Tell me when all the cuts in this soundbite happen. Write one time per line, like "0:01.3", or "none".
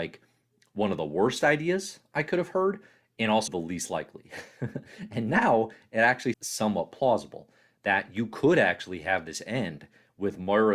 0:03.5
0:06.3